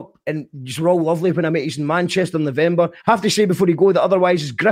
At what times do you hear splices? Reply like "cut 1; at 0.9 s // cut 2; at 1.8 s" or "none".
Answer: cut 1; at 3.0 s